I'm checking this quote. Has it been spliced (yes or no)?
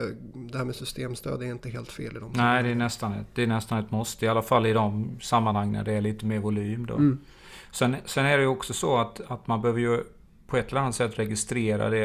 no